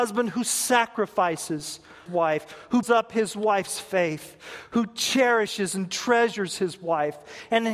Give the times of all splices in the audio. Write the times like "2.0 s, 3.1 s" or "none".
2.1 s, 2.8 s